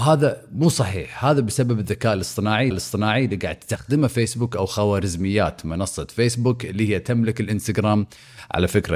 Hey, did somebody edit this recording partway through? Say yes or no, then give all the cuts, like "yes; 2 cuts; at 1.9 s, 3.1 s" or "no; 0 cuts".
yes; 1 cut; at 2.7 s